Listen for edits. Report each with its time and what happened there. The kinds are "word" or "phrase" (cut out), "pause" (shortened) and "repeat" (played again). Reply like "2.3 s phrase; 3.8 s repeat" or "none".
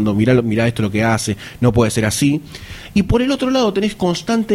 none